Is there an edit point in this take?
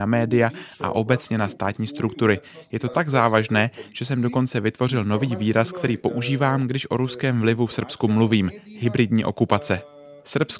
no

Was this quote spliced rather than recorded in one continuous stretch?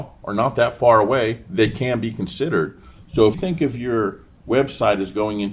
yes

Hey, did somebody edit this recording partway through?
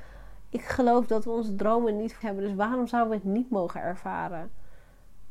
yes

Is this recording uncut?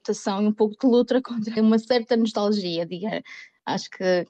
no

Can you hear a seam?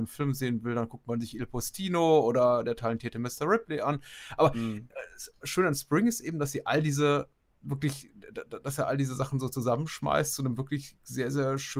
no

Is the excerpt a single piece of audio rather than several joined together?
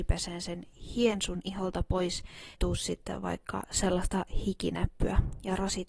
no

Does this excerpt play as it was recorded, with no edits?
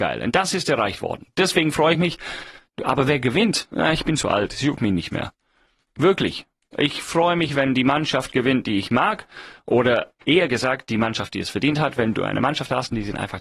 yes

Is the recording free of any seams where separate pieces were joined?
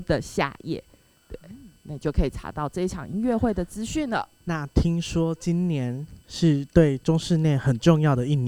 no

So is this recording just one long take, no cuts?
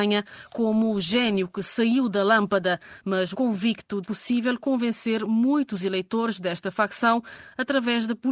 no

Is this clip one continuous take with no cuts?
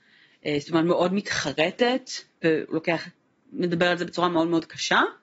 yes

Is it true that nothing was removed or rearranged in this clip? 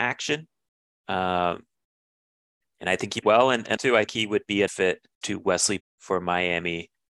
no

